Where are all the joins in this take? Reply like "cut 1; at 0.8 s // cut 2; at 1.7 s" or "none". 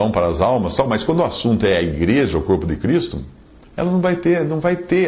none